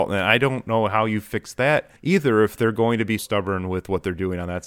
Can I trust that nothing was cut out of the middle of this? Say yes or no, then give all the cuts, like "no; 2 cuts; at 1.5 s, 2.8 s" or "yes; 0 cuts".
no; 2 cuts; at 2.0 s, 3.2 s